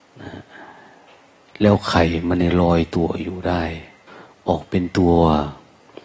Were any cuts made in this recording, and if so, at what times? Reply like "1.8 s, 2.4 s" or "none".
4.1 s